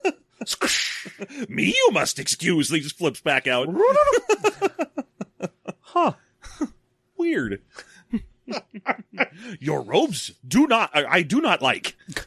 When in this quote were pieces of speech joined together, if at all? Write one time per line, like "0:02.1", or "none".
none